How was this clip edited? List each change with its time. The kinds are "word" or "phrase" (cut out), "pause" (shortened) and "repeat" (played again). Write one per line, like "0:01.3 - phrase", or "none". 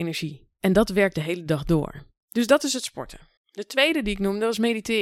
0:01.1 - word
0:03.4 - pause